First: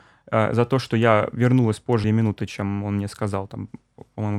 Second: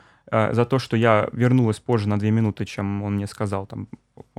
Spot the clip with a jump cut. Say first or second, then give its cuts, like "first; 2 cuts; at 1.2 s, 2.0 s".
first; 1 cut; at 2.0 s